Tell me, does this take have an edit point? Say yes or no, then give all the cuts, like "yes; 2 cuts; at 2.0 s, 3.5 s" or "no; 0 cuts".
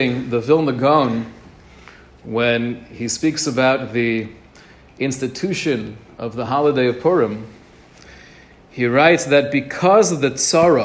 no; 0 cuts